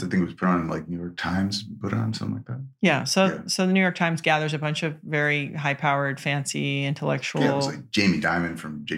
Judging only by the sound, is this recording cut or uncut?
uncut